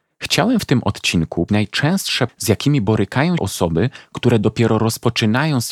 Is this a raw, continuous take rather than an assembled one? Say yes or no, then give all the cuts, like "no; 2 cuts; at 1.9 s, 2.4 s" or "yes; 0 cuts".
no; 3 cuts; at 1.5 s, 2.3 s, 3.4 s